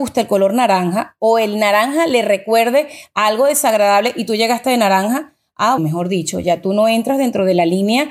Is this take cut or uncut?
cut